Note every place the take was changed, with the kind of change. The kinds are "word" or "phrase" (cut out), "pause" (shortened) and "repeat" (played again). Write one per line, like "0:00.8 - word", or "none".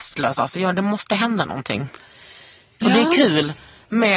none